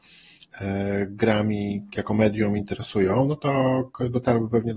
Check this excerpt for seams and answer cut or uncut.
uncut